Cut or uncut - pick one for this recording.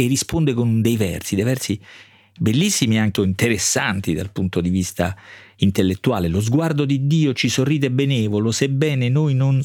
cut